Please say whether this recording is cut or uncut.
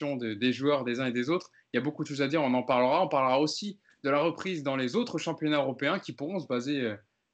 uncut